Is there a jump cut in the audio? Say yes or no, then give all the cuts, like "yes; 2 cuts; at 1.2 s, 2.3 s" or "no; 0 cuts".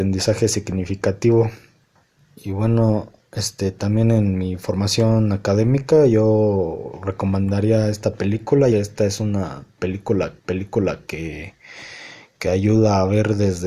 yes; 3 cuts; at 2.0 s, 8.7 s, 10.4 s